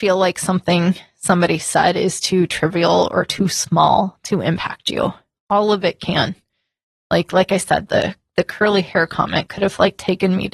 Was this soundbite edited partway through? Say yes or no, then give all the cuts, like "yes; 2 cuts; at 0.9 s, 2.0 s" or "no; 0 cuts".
no; 0 cuts